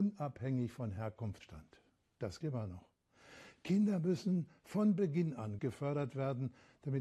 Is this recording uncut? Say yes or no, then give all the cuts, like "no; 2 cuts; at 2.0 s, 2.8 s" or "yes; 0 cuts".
no; 3 cuts; at 1.4 s, 2.4 s, 5.6 s